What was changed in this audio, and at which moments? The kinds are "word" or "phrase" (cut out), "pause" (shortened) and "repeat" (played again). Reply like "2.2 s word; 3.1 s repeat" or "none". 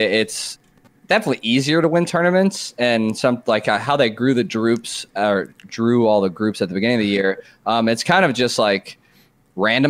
none

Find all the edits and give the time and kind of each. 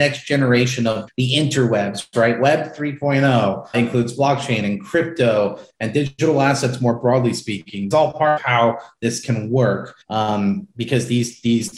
1.1 s word; 3.7 s word; 7.9 s phrase; 8.4 s phrase; 10.0 s pause

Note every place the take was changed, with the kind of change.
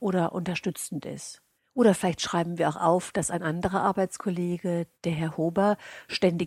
1.6 s pause; 4.9 s pause

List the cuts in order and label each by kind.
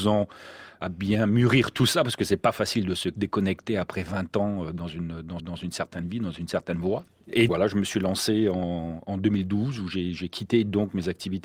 5.4 s repeat; 7.5 s word

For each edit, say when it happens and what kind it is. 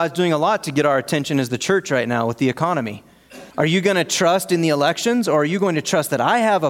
3.5 s pause

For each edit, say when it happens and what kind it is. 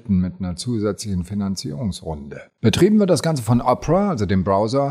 none

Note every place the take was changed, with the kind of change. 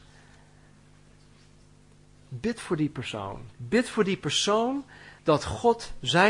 3.5 s pause; 5.2 s pause

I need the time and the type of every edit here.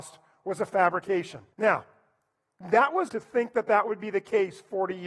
1.5 s pause; 3.1 s word

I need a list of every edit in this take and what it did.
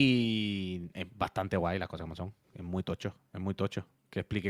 2.4 s pause

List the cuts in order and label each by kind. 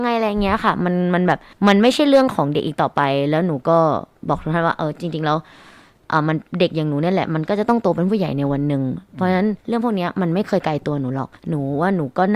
1.5 s pause; 9.6 s pause; 11.4 s pause

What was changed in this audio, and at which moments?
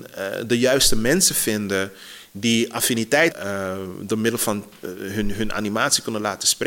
3.3 s phrase

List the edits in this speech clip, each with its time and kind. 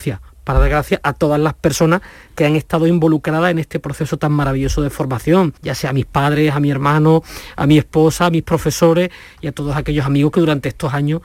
5.6 s pause

